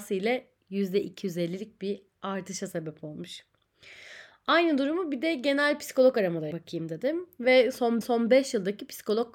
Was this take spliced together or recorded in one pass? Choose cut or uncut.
cut